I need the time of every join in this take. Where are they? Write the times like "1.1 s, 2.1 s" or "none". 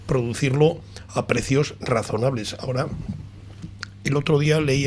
none